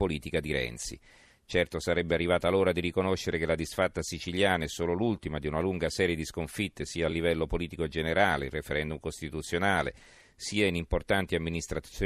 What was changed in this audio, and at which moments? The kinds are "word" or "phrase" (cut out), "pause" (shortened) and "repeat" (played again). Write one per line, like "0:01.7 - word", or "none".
none